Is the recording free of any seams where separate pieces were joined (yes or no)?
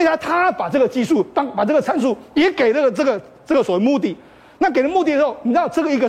yes